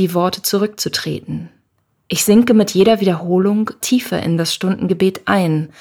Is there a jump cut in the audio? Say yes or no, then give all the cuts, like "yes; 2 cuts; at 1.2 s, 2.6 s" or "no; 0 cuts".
yes; 1 cut; at 3.8 s